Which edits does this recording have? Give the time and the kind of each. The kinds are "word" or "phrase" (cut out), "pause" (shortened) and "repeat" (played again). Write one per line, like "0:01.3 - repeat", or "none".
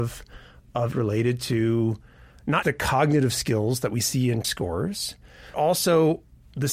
0:00.9 - word
0:02.6 - word
0:04.4 - word
0:05.5 - word